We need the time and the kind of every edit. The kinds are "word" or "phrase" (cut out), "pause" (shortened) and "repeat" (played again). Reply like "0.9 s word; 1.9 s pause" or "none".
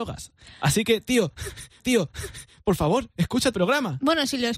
1.8 s repeat; 3.5 s word